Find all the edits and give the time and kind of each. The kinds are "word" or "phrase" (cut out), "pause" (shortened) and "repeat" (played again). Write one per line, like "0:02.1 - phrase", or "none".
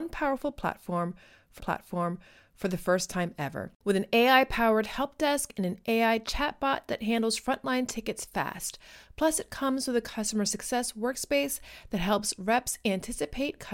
0:01.6 - repeat